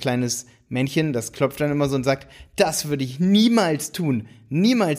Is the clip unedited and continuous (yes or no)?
yes